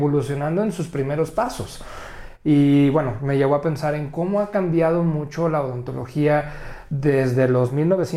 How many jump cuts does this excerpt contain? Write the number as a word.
zero